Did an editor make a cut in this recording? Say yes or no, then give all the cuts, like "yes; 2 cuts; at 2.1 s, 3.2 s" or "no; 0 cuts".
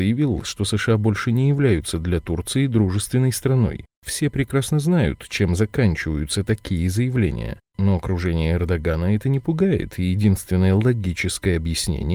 no; 0 cuts